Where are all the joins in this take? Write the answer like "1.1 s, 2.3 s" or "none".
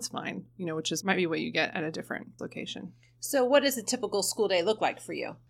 1.0 s, 2.4 s